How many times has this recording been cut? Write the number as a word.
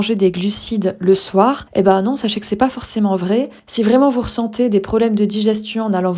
one